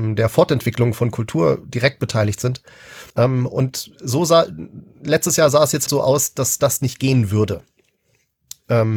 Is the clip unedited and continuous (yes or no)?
no